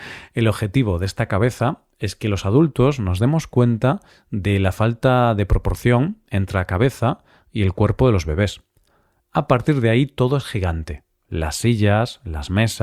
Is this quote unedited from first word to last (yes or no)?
yes